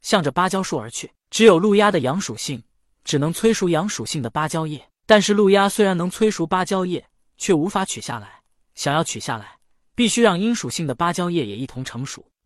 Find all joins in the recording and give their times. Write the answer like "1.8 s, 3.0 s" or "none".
none